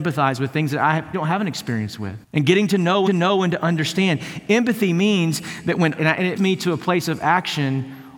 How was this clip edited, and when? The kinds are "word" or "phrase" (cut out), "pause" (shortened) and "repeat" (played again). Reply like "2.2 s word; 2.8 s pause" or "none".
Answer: 1.1 s word; 2.2 s pause; 3.1 s repeat; 6.0 s phrase; 6.4 s word